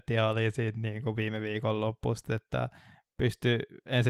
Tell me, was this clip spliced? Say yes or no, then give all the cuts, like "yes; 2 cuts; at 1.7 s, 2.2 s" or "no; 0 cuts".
no; 0 cuts